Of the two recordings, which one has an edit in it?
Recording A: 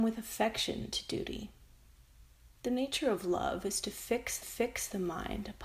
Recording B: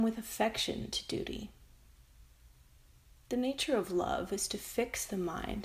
A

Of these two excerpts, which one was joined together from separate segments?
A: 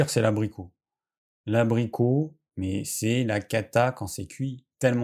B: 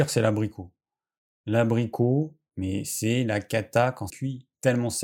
B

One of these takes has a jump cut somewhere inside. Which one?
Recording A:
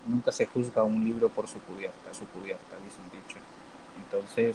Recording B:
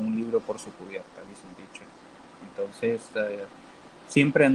A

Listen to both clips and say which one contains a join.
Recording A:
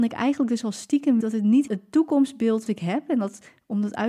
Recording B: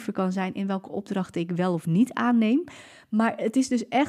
A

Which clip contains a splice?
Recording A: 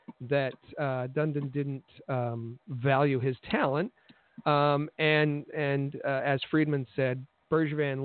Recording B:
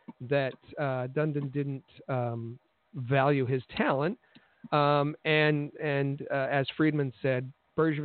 A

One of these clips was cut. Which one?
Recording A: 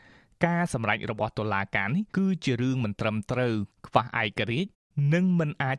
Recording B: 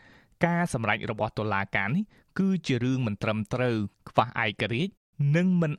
A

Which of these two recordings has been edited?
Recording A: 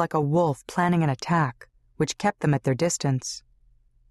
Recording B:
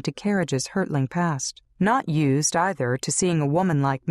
B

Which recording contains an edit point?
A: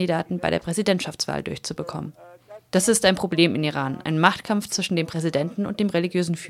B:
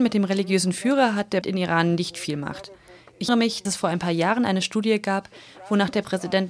B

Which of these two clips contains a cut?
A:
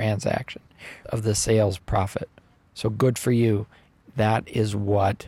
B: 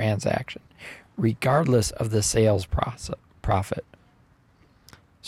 A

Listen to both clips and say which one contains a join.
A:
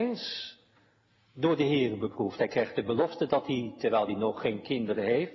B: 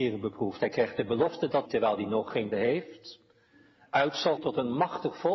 B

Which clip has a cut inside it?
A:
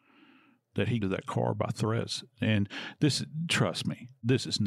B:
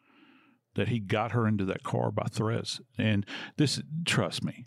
A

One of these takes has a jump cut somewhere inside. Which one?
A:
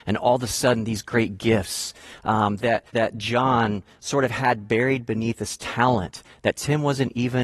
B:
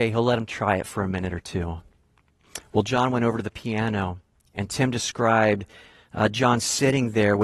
A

